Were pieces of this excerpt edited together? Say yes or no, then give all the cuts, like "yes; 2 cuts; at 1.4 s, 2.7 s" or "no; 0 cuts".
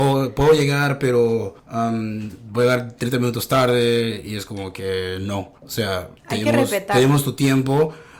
yes; 3 cuts; at 1.6 s, 5.6 s, 6.2 s